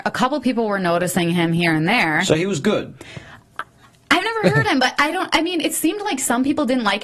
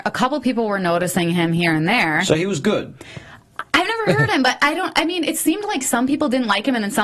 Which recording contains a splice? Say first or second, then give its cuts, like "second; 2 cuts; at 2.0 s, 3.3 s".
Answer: second; 1 cut; at 3.7 s